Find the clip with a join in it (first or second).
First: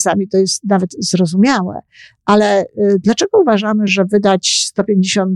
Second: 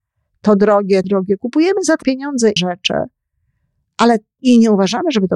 second